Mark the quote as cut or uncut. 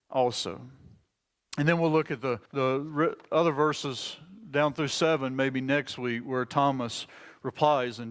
cut